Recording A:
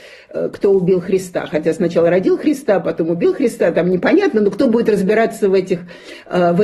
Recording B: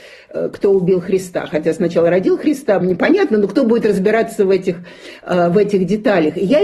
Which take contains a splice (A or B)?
B